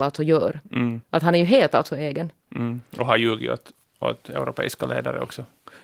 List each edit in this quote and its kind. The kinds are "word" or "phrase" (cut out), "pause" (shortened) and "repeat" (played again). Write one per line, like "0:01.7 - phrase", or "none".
0:01.0 - pause